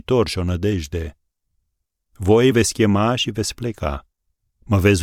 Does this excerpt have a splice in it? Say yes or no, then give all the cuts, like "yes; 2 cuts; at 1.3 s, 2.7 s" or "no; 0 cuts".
yes; 1 cut; at 2.5 s